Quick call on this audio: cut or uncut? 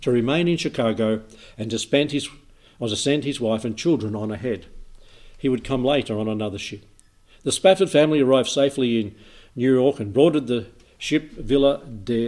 uncut